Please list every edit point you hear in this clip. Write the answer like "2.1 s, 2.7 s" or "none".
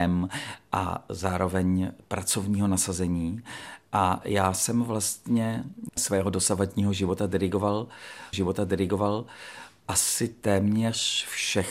5.9 s, 8.3 s